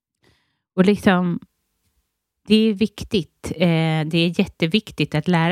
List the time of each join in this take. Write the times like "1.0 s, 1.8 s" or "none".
none